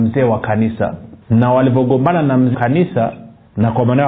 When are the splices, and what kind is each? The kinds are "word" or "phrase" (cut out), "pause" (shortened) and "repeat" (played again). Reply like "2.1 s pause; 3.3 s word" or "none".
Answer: 1.2 s pause; 2.5 s word